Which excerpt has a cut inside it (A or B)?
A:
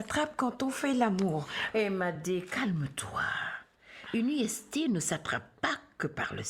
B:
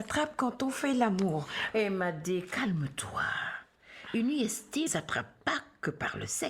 B